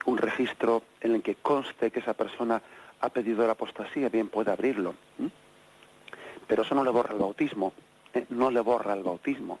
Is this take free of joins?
yes; 0 cuts

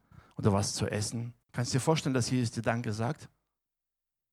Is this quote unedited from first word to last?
no; 1 cut; at 1.4 s

